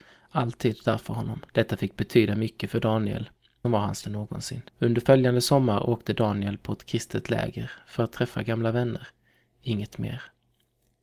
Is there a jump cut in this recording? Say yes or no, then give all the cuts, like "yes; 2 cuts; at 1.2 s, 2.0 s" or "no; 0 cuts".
yes; 4 cuts; at 1.5 s, 3.6 s, 4.0 s, 4.7 s